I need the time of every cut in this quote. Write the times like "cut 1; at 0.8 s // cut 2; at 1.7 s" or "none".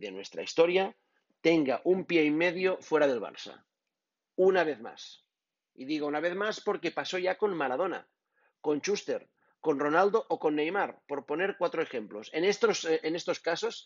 none